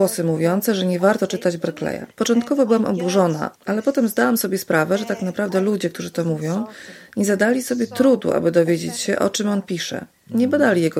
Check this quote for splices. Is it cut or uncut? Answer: cut